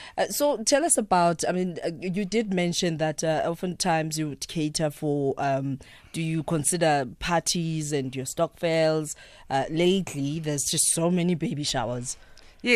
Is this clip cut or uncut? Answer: uncut